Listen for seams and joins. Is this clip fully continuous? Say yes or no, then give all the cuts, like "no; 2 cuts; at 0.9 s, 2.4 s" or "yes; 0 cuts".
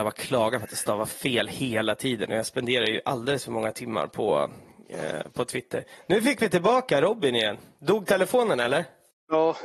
yes; 0 cuts